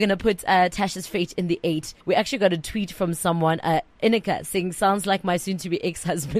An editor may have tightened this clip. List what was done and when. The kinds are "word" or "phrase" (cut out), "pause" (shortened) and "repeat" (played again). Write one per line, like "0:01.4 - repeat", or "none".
0:02.0 - pause

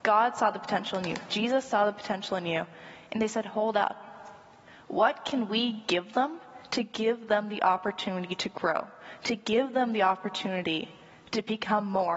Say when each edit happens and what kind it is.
none

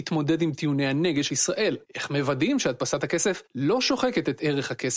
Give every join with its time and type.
0:01.3 - word
0:01.8 - pause
0:03.5 - pause

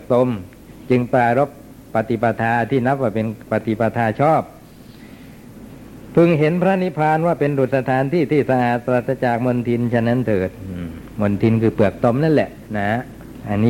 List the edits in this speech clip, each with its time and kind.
none

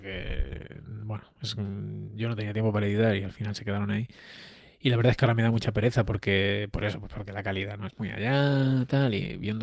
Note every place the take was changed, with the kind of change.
none

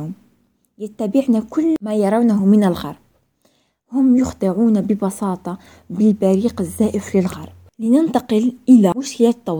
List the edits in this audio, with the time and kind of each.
none

